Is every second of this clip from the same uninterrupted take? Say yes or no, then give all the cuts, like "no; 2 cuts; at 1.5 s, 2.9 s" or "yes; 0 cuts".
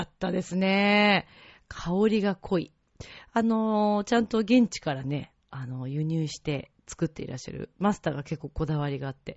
yes; 0 cuts